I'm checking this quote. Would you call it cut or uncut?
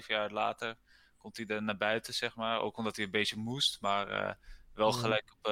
uncut